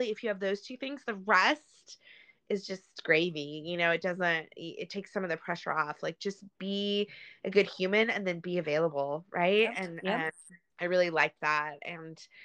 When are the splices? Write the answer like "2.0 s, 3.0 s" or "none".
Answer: 10.7 s